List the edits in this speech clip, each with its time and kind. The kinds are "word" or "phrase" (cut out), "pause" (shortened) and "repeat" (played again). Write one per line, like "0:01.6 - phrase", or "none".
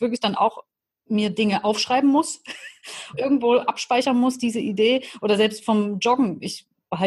0:03.1 - word